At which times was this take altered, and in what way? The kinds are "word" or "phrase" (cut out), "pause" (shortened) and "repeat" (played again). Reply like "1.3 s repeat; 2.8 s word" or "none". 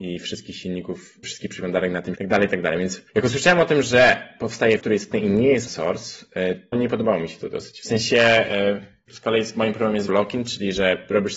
1.2 s word; 2.1 s word; 4.8 s word; 5.1 s word; 5.7 s word; 6.7 s word; 9.1 s word; 10.1 s word